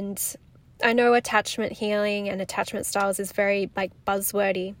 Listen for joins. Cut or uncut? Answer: uncut